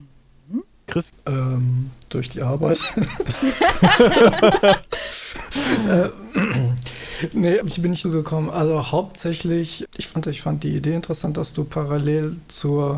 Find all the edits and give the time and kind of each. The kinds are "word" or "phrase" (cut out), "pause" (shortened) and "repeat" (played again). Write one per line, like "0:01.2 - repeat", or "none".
0:01.1 - phrase
0:07.6 - word
0:08.0 - word
0:09.9 - word
0:10.2 - phrase